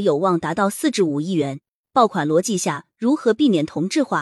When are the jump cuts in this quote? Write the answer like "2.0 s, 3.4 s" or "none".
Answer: none